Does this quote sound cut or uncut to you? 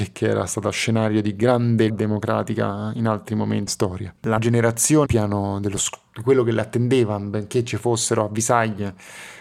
cut